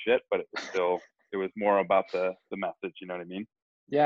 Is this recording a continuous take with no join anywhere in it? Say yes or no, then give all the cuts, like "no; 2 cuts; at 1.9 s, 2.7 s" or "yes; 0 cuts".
yes; 0 cuts